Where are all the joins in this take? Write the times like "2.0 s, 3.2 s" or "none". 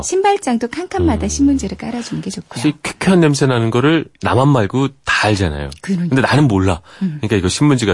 4.1 s